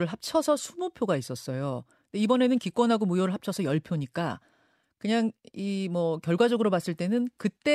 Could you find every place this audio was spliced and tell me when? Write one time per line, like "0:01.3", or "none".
none